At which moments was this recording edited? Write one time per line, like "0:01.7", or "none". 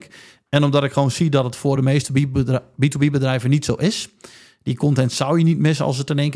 none